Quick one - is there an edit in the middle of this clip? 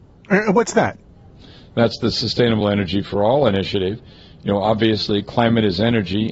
no; 0 cuts

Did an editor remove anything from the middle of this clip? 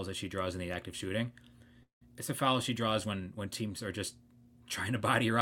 no; 0 cuts

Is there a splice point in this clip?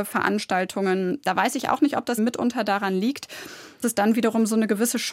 yes; 2 cuts; at 2.2 s, 3.8 s

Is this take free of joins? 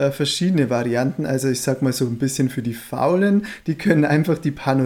yes; 0 cuts

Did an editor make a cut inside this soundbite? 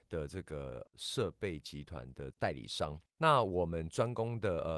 no; 0 cuts

